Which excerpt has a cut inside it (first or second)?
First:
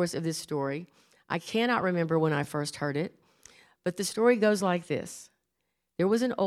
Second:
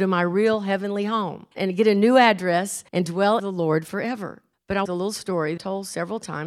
second